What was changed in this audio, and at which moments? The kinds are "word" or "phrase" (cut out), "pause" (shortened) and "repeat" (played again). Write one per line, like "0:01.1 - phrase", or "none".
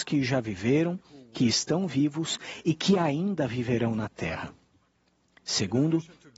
none